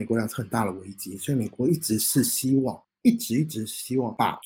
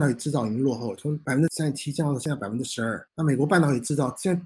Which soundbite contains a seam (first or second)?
second